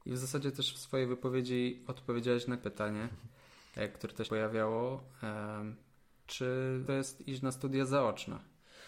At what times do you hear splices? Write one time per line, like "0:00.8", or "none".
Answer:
0:02.6
0:04.2
0:06.9

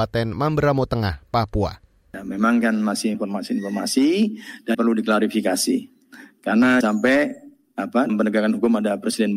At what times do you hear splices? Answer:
0:02.6
0:03.1
0:04.7
0:06.8
0:08.1

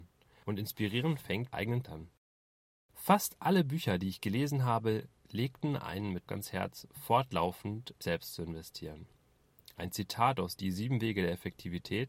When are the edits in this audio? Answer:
0:01.5
0:01.8
0:06.3
0:08.0

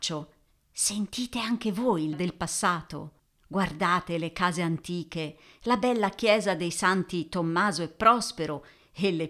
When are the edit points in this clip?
0:02.1
0:03.2

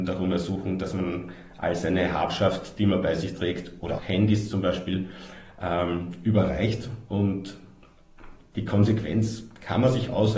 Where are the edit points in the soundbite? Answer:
0:04.0

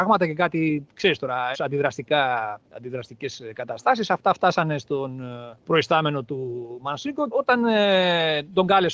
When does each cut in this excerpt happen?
0:01.5
0:02.6
0:05.6
0:07.3

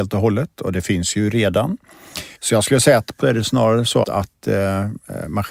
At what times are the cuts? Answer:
0:02.4
0:03.2
0:04.0

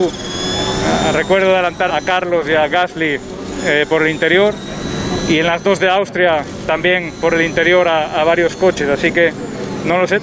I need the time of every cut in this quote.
0:01.9

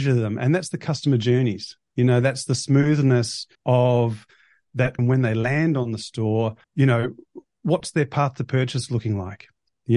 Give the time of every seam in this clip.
0:03.5
0:05.0
0:06.6

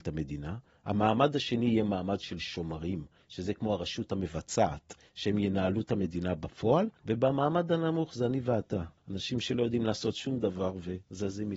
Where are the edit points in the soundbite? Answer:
0:07.0
0:09.0

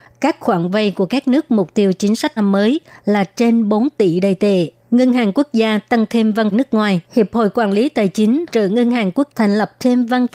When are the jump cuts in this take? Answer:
0:02.4
0:04.8
0:06.5
0:07.0
0:08.5
0:09.3

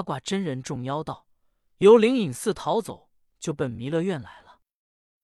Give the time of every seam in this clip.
none

